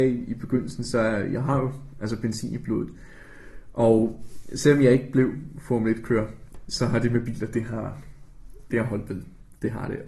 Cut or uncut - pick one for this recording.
cut